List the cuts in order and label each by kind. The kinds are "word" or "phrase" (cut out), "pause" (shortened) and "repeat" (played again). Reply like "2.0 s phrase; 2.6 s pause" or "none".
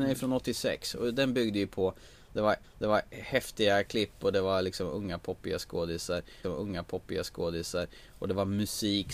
2.6 s repeat; 6.4 s repeat